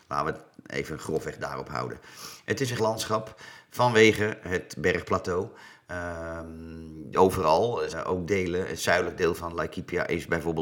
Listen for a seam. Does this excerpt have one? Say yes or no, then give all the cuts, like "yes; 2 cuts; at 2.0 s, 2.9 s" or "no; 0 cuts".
yes; 3 cuts; at 2.8 s, 7.1 s, 7.9 s